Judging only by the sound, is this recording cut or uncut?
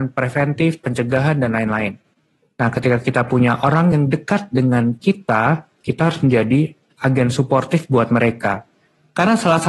uncut